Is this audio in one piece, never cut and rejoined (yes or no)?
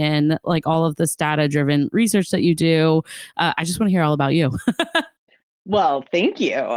yes